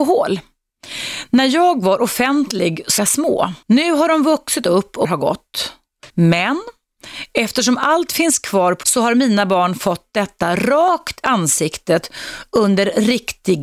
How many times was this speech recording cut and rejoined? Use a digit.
6